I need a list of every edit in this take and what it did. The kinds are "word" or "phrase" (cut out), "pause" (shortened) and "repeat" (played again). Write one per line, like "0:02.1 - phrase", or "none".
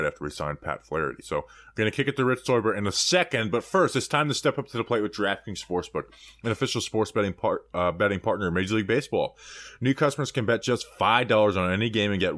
none